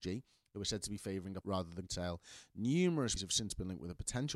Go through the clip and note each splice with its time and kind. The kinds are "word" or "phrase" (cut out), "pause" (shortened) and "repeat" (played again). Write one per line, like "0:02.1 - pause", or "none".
0:01.4 - word
0:01.9 - word
0:03.2 - word